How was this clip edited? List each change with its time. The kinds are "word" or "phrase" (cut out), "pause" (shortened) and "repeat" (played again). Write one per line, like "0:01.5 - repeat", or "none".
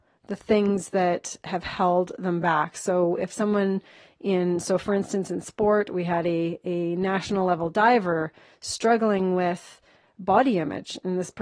none